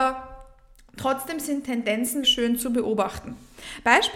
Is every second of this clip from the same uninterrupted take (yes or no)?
no